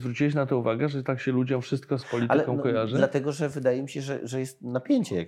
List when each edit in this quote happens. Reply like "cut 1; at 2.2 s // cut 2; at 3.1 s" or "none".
none